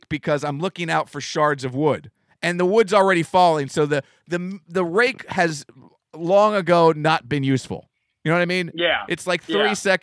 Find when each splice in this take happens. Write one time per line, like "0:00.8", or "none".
none